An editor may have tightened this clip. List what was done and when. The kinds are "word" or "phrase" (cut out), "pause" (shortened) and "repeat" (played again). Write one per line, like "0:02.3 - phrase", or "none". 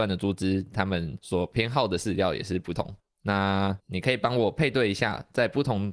0:03.8 - word